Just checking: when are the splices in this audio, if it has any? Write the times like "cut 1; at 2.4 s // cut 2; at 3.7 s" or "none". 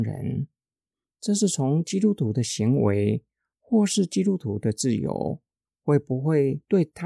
none

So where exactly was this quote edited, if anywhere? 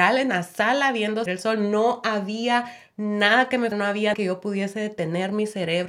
cut 1; at 1.3 s // cut 2; at 3.7 s // cut 3; at 4.1 s

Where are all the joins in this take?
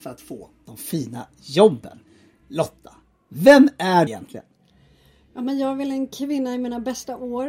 cut 1; at 4.1 s

